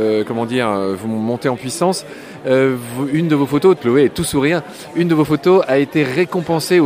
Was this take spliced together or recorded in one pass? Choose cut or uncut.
cut